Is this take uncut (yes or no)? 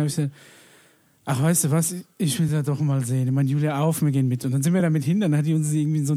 yes